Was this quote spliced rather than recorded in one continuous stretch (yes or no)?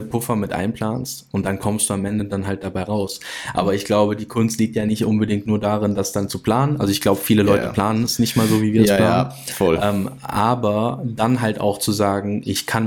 no